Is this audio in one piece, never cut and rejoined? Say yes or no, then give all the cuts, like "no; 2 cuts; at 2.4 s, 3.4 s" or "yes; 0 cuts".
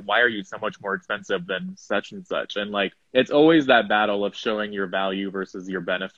no; 1 cut; at 3.0 s